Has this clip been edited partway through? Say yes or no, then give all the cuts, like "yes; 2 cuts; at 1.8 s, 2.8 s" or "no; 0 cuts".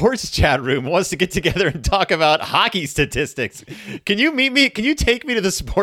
no; 0 cuts